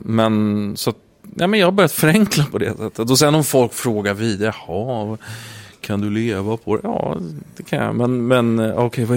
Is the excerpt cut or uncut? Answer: uncut